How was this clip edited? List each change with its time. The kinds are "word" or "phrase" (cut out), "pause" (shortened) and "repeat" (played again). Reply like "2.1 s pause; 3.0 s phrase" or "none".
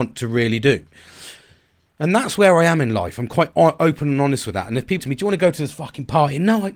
5.0 s word

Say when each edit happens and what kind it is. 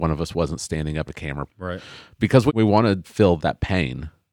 1.1 s phrase; 1.5 s word; 2.5 s word; 3.0 s word; 3.4 s word

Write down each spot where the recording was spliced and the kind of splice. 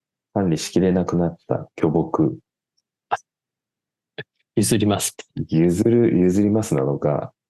none

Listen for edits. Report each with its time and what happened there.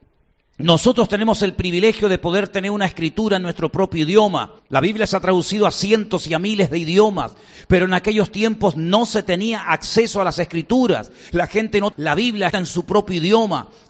4.6 s pause; 11.9 s word; 12.5 s word

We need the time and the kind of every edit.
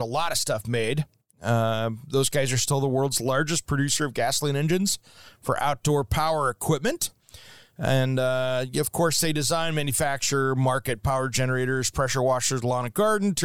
none

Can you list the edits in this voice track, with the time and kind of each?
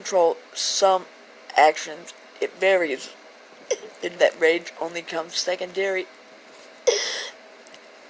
3.3 s pause; 4.2 s word

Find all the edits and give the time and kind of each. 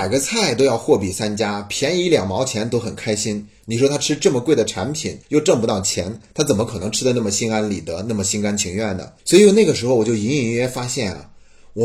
5.2 s pause; 9.2 s pause

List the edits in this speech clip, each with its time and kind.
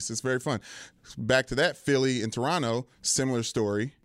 2.9 s pause

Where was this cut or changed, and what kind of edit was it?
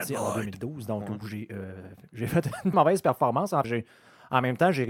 2.7 s word; 3.6 s word

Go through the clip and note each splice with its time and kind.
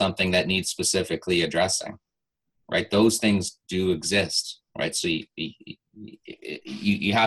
3.6 s word; 4.7 s pause

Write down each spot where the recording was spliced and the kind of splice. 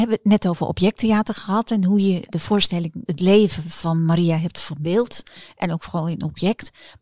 2.3 s word; 3.1 s word

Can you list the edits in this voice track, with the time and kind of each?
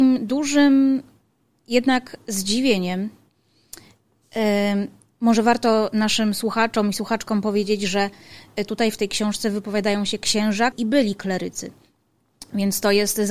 10.7 s word

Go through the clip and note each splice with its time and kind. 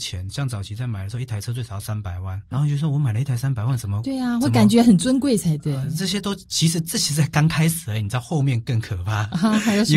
2.5 s word

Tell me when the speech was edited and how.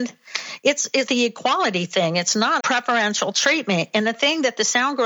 1.1 s word; 2.6 s word

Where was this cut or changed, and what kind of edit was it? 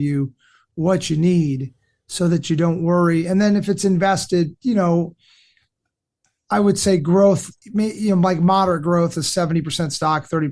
none

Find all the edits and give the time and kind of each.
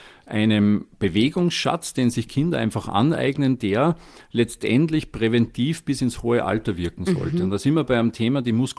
none

